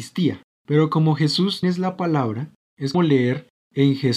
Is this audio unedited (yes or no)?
no